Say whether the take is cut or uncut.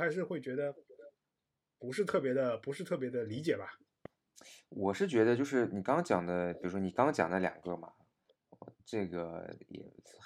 uncut